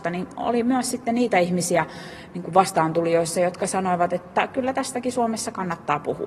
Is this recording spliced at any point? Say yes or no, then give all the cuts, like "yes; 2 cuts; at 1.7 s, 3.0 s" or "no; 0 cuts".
no; 0 cuts